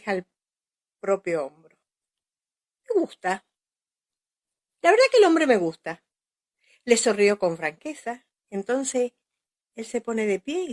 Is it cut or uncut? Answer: uncut